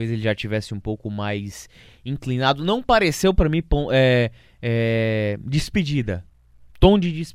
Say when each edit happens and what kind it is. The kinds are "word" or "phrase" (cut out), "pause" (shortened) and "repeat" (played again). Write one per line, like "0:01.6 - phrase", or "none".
none